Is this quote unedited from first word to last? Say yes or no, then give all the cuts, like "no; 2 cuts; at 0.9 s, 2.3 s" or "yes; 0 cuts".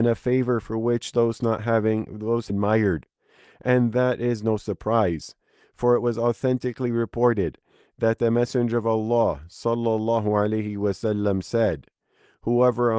no; 1 cut; at 2.5 s